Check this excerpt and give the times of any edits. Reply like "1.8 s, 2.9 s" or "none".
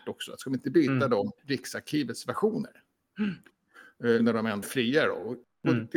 1.4 s, 4.2 s, 4.6 s